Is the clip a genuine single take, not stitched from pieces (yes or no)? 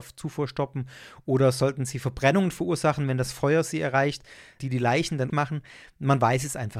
no